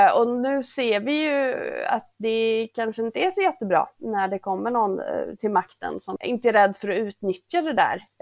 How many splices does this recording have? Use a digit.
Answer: 2